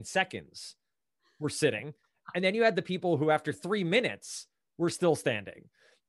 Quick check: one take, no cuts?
yes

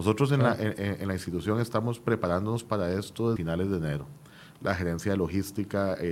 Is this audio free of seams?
no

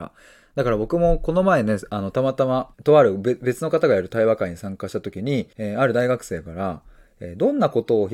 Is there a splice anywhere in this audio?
yes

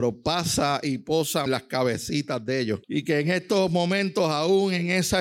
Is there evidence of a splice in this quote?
yes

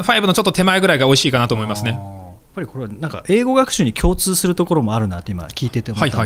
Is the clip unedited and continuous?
no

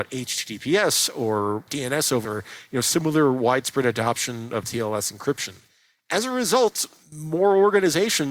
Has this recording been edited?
yes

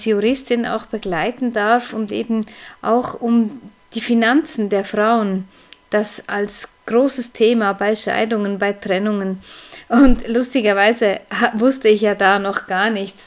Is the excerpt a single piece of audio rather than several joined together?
yes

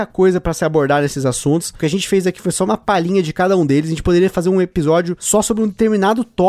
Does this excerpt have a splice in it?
no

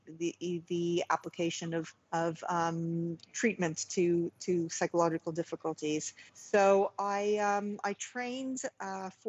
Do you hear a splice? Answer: yes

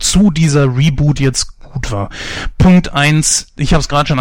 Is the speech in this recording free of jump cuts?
yes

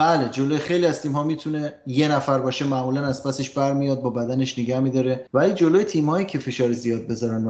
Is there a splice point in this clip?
no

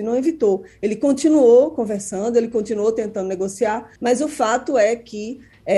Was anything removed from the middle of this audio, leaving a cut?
yes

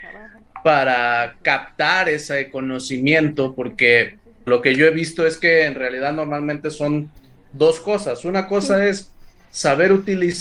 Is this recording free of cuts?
no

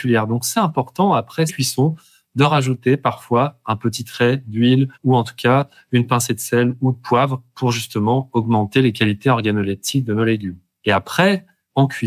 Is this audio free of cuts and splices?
no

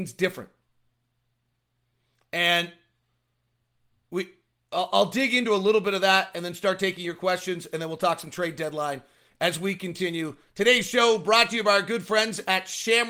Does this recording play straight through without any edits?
yes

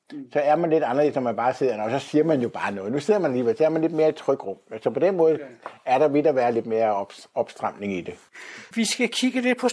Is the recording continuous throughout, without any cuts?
yes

